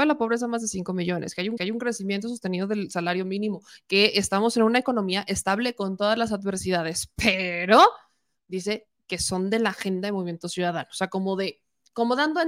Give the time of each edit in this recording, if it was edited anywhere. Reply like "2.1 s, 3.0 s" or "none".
1.6 s